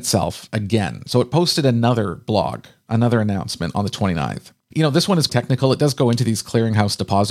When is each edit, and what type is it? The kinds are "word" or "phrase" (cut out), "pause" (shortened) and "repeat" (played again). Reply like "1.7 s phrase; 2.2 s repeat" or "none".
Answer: 5.3 s word